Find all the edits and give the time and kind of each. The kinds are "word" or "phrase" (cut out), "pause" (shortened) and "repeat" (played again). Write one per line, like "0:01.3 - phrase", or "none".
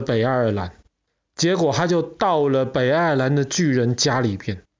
0:01.1 - pause